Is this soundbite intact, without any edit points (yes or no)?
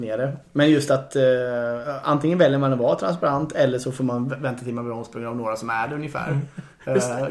yes